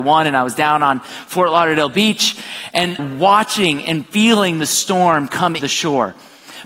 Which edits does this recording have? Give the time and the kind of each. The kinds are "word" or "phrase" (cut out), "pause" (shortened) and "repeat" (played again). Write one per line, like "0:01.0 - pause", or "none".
0:03.0 - phrase
0:05.6 - word